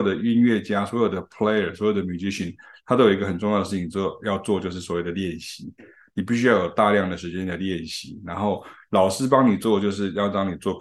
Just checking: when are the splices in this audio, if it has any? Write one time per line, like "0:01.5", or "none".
none